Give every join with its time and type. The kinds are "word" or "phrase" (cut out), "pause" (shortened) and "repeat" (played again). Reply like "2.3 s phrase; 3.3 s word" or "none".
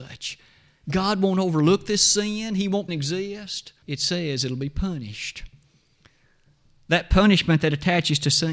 2.9 s phrase; 3.8 s pause